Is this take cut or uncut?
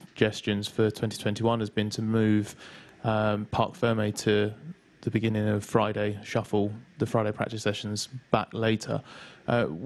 uncut